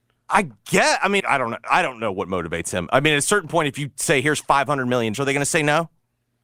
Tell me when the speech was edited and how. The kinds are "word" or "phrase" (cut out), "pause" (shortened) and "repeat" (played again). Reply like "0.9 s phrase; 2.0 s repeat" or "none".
1.2 s word; 5.1 s word